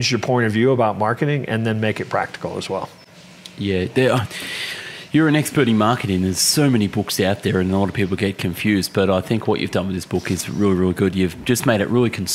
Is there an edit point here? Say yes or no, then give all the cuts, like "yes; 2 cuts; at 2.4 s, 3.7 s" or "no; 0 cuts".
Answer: no; 0 cuts